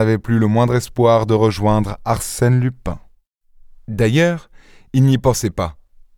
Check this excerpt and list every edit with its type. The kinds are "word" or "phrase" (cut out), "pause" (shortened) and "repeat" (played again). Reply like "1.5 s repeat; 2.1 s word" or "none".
none